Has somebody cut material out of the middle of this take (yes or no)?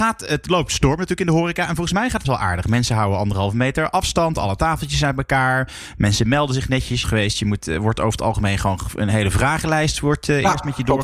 yes